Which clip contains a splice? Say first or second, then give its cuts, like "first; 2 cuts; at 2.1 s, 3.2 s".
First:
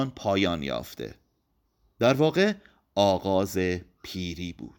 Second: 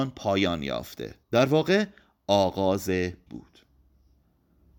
second; 2 cuts; at 1.2 s, 3.3 s